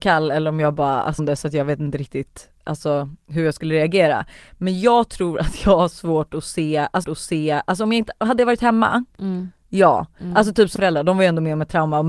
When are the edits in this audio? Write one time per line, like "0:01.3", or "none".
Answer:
0:01.2
0:07.0
0:10.8